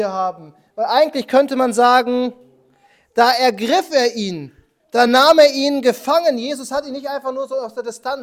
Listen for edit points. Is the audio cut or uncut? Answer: uncut